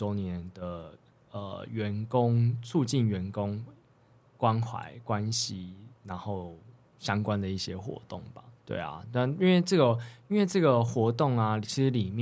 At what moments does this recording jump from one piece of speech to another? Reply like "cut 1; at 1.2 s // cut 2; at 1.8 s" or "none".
cut 1; at 6.0 s // cut 2; at 8.6 s

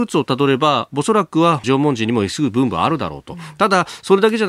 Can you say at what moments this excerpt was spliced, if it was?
cut 1; at 1.6 s

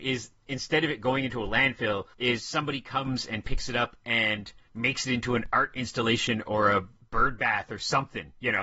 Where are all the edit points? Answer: none

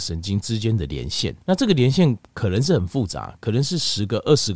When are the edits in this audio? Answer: cut 1; at 1.4 s

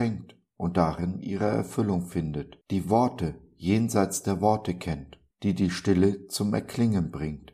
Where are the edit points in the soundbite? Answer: cut 1; at 2.6 s // cut 2; at 5.3 s

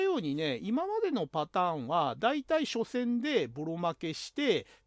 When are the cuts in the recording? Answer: none

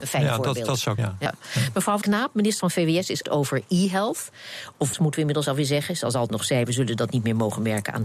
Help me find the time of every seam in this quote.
cut 1; at 1.0 s // cut 2; at 2.0 s // cut 3; at 2.6 s // cut 4; at 3.2 s // cut 5; at 4.9 s // cut 6; at 6.3 s // cut 7; at 6.6 s

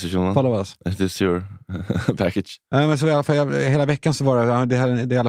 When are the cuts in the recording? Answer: none

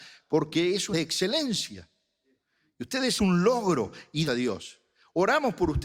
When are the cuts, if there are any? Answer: cut 1; at 0.9 s // cut 2; at 3.2 s // cut 3; at 4.3 s

